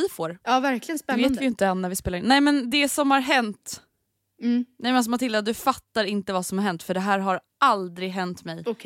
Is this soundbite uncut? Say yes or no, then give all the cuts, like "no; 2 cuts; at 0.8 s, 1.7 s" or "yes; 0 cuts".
yes; 0 cuts